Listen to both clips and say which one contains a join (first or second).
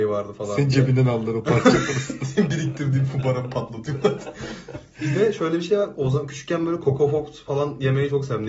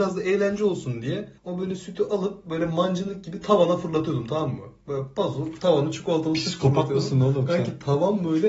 second